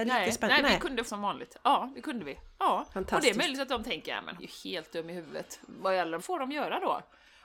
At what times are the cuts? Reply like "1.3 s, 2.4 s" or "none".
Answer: 1.1 s, 4.4 s, 6.2 s